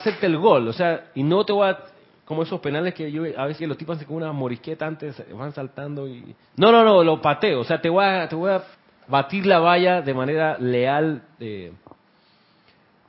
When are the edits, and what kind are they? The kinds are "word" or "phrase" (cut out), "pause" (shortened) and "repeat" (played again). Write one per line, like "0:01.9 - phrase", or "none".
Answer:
0:03.6 - phrase
0:06.5 - pause
0:08.7 - pause